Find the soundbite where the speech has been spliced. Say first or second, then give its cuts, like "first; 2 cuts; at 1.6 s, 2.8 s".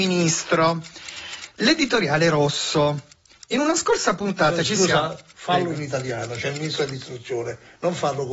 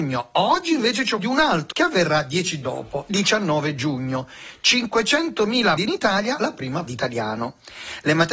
second; 7 cuts; at 1.2 s, 1.7 s, 2.6 s, 3.1 s, 5.8 s, 6.4 s, 6.9 s